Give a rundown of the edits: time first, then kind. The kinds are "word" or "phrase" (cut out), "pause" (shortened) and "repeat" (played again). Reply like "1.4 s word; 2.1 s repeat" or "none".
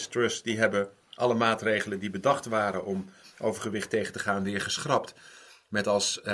none